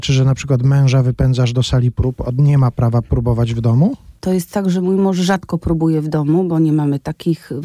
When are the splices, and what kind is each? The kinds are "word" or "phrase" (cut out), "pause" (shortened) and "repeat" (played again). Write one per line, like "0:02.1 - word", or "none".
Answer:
0:04.2 - pause